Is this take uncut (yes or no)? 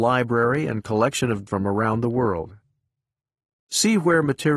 no